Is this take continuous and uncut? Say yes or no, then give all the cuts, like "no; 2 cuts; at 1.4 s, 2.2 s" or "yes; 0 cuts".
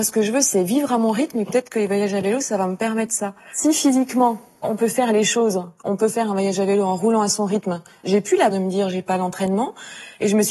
no; 2 cuts; at 4.6 s, 8.5 s